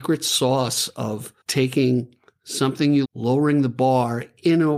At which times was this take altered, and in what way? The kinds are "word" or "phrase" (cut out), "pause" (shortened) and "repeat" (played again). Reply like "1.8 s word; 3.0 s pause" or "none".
1.4 s pause; 3.0 s word